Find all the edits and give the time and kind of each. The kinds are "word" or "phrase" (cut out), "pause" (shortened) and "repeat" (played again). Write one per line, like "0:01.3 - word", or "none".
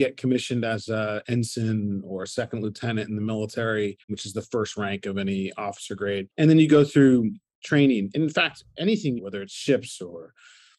0:04.0 - pause
0:06.3 - pause
0:09.2 - phrase